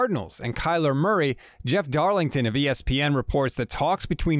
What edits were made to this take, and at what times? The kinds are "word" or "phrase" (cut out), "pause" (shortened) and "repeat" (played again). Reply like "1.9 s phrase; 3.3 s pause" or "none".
none